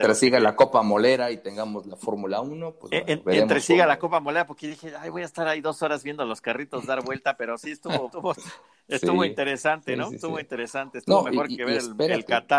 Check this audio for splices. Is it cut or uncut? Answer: cut